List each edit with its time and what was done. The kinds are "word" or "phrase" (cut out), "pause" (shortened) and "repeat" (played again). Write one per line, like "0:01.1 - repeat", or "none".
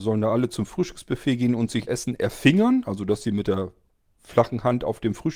0:01.9 - word